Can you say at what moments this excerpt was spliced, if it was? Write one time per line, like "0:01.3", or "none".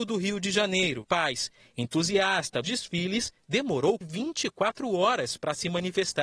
0:01.0
0:02.6
0:04.0